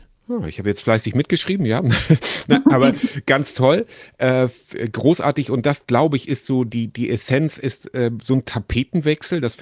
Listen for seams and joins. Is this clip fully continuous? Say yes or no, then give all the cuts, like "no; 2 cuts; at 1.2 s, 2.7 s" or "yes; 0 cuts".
yes; 0 cuts